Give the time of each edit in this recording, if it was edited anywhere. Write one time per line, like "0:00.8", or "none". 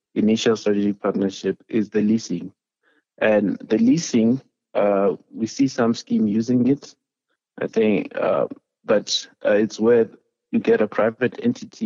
none